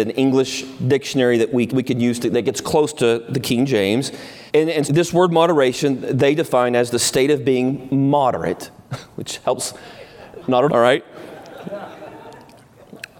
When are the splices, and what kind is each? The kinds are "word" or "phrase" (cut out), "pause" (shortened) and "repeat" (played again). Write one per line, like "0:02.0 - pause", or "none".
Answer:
0:01.7 - word
0:04.5 - pause
0:04.8 - word
0:10.7 - word